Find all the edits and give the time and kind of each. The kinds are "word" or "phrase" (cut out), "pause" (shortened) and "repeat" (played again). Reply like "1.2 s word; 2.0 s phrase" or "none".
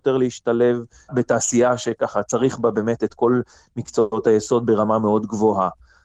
none